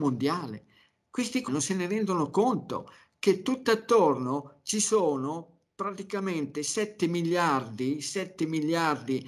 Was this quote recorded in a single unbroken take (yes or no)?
no